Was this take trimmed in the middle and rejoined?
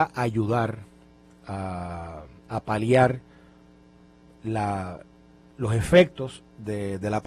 no; 0 cuts

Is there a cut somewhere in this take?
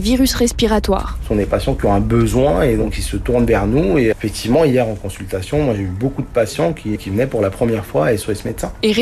yes; 2 cuts; at 4.1 s, 6.9 s

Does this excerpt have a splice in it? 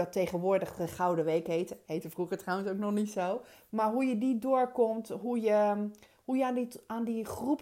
no; 0 cuts

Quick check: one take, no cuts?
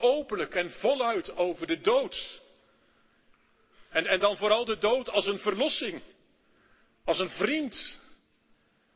yes; 0 cuts

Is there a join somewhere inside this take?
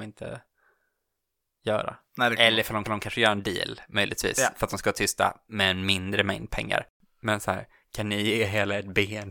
yes; 1 cut; at 2.8 s

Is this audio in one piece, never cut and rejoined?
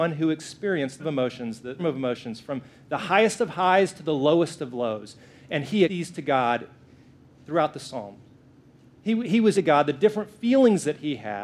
no; 4 cuts; at 1.0 s, 1.8 s, 5.9 s, 9.5 s

